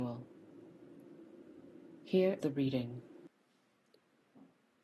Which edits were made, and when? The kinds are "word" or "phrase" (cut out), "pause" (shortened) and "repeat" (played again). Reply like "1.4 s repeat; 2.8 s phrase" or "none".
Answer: 2.4 s word